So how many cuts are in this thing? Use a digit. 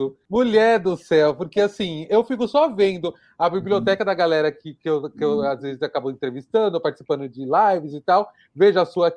0